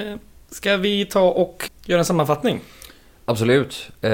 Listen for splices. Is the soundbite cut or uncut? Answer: cut